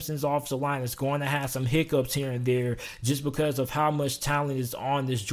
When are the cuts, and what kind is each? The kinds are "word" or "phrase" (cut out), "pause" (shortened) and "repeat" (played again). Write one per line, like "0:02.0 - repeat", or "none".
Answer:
none

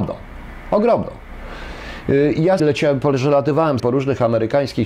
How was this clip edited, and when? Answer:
0:02.6 - phrase
0:03.8 - word

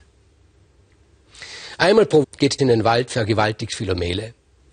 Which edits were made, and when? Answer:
0:02.2 - word
0:02.6 - word

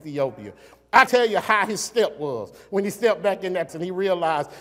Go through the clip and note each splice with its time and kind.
0:01.1 - word
0:01.4 - word
0:03.7 - word

